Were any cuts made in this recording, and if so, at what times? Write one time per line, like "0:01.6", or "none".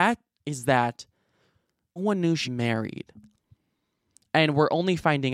0:02.0
0:02.4

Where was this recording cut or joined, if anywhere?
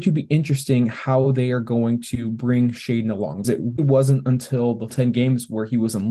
0:03.4
0:03.8
0:04.9

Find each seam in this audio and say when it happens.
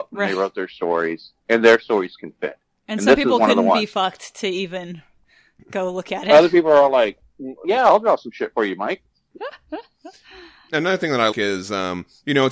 0:01.4
0:07.6
0:11.3

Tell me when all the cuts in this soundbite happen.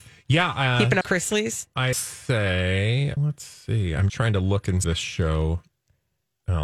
0:01.0
0:01.9
0:03.2
0:04.1
0:04.8

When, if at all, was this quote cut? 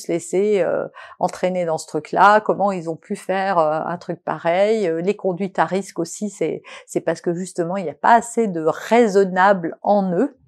none

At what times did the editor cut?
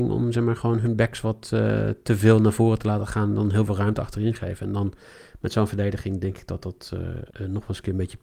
0:07.3

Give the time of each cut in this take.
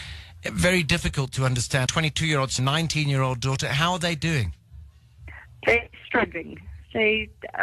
0:01.9
0:02.6

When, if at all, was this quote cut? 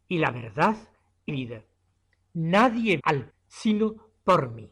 0:01.3
0:03.0
0:03.3

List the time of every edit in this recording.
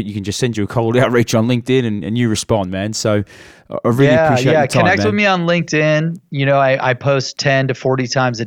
none

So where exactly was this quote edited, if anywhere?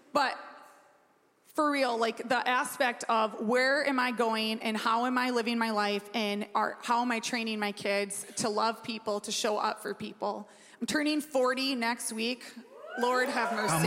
none

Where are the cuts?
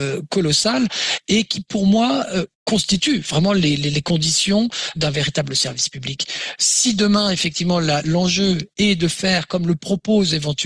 0:04.9

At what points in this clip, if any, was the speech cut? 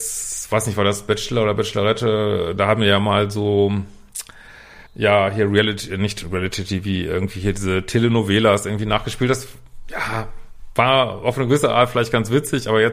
0:04.9

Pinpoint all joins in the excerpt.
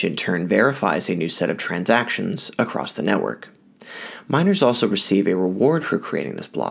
none

